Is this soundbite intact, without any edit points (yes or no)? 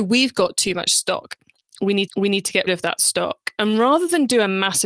no